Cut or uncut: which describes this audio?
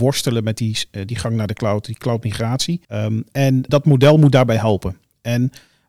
cut